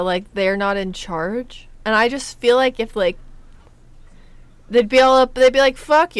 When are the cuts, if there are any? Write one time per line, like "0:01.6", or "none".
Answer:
none